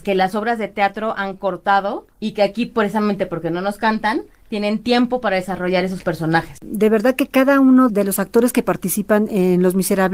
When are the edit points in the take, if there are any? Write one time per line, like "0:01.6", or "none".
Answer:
0:02.1